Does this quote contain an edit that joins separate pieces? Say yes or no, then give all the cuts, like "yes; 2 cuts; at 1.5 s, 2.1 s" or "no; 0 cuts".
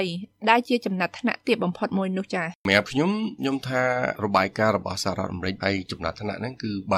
yes; 1 cut; at 2.6 s